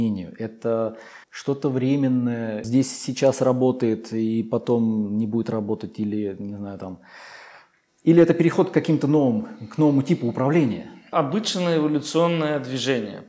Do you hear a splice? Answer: yes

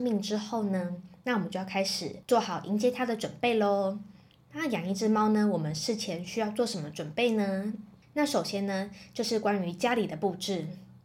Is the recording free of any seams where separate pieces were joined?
yes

